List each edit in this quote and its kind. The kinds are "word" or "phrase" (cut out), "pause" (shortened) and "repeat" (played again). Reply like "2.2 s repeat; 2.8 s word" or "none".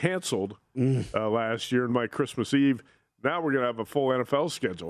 1.9 s word